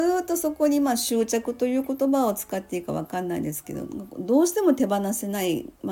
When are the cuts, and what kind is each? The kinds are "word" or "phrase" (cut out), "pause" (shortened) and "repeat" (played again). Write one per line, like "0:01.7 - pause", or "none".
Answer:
none

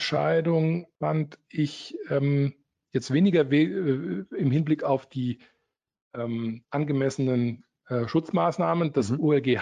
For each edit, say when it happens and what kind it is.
0:00.9 - pause

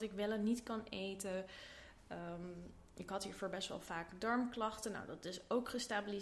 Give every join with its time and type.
none

